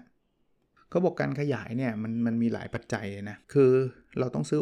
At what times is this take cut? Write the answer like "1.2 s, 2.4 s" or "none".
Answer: 3.4 s